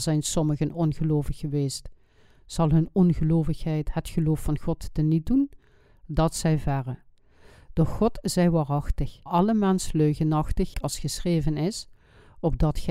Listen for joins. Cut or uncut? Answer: cut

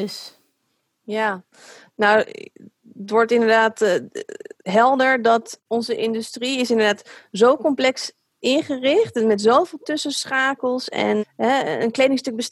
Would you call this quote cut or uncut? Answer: cut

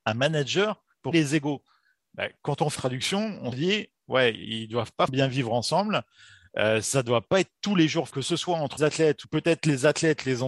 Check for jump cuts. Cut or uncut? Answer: cut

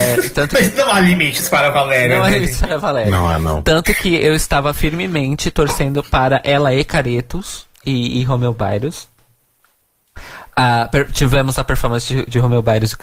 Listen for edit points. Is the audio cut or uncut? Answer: cut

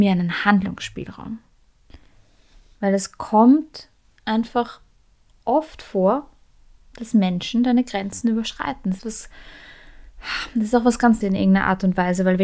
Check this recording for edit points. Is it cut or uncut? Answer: cut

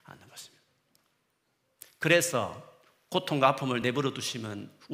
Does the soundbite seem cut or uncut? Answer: uncut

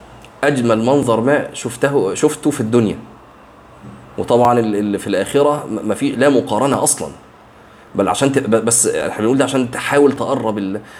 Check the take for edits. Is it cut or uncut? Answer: uncut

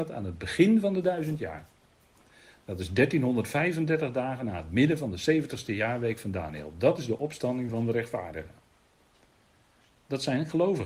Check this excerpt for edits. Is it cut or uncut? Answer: uncut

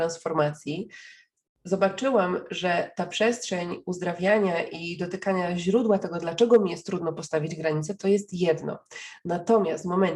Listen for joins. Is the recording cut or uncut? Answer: uncut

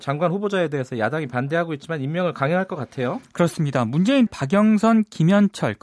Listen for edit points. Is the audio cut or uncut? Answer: cut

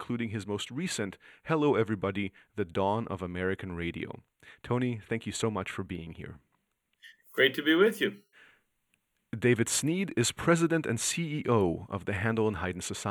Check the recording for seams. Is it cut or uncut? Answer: uncut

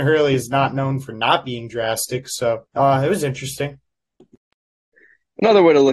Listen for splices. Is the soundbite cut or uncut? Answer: cut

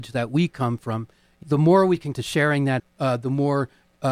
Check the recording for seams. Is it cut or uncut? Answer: cut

